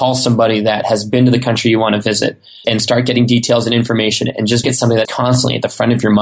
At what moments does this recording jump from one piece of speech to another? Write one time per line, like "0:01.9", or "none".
0:02.6
0:04.6
0:05.0